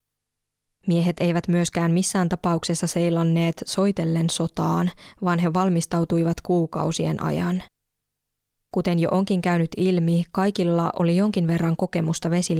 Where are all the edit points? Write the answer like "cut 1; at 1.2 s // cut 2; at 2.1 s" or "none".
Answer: none